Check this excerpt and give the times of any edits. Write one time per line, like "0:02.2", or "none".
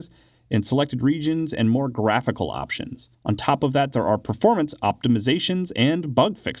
0:03.1